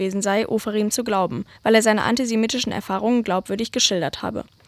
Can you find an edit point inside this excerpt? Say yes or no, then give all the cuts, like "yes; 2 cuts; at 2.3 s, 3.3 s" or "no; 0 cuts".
yes; 1 cut; at 1.6 s